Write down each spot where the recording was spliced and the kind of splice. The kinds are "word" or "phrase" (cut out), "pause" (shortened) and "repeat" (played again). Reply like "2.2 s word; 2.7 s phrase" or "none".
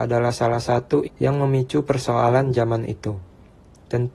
1.1 s word

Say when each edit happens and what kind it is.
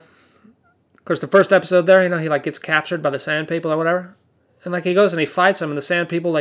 none

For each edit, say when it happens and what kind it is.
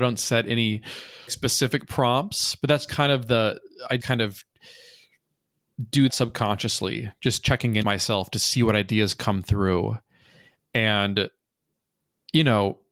1.3 s word; 2.9 s word; 3.6 s word; 4.0 s word; 6.1 s word; 7.8 s word

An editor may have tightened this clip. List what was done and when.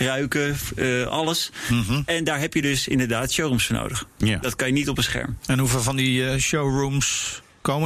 none

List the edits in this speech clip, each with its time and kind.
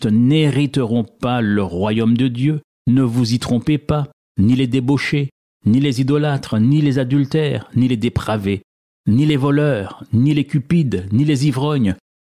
none

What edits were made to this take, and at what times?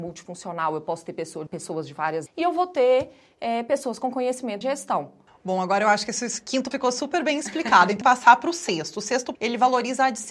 1.5 s word; 2.3 s word; 4.6 s word; 6.7 s word; 8.0 s word; 9.3 s word

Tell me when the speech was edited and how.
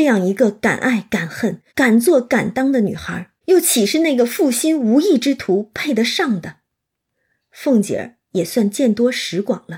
1.7 s pause; 3.4 s pause

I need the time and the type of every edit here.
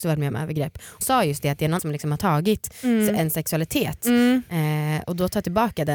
1.0 s word; 1.8 s word

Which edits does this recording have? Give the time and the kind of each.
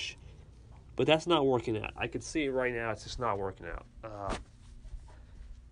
none

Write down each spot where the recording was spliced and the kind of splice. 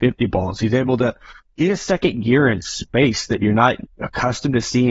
none

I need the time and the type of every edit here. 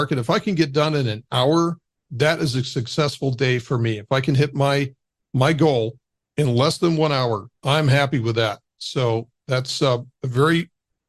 7.5 s pause

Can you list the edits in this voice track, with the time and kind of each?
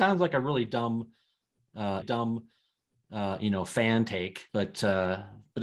2.0 s repeat; 4.5 s pause

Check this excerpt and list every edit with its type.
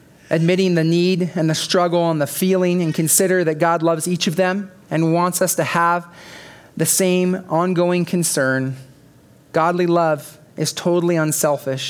none

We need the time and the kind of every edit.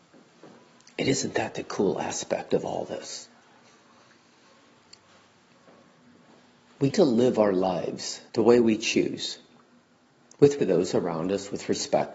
6.9 s word; 8.3 s pause; 10.6 s word

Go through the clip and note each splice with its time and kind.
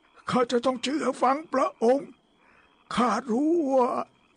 none

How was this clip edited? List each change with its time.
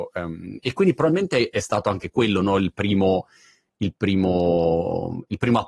none

